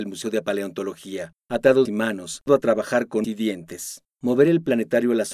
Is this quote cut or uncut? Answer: cut